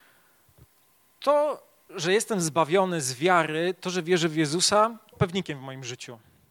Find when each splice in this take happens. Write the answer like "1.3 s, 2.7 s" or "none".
5.1 s